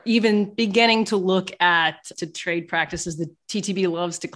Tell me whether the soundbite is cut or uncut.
cut